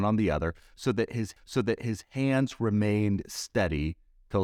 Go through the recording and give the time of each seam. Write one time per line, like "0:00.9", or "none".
0:01.4